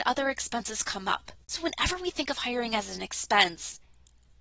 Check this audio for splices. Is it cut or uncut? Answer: cut